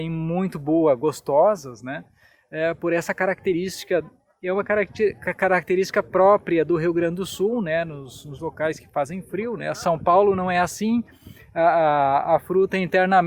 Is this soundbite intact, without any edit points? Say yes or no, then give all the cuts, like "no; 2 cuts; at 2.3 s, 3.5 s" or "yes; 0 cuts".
yes; 0 cuts